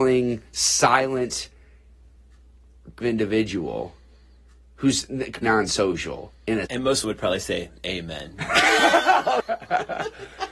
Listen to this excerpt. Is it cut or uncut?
cut